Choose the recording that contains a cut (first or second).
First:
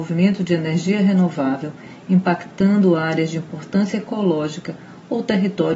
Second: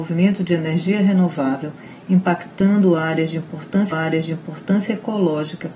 second